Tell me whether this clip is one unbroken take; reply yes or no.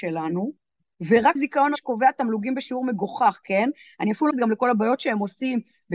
no